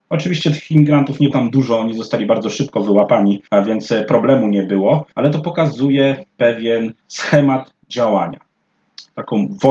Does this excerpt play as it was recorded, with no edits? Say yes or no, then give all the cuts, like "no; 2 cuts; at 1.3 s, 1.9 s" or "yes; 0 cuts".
no; 4 cuts; at 1.3 s, 3.5 s, 5.1 s, 7.0 s